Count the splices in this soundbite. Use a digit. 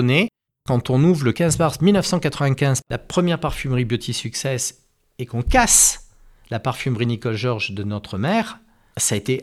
0